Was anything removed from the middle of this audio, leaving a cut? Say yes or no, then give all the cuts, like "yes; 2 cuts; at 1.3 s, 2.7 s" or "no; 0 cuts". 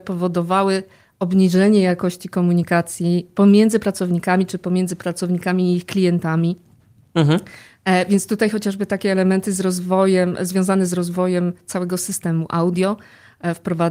no; 0 cuts